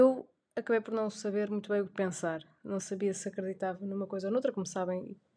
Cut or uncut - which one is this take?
uncut